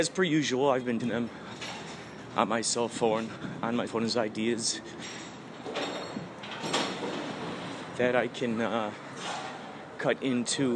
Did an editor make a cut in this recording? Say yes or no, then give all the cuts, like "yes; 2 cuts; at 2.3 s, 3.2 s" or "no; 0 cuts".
yes; 2 cuts; at 1.0 s, 3.9 s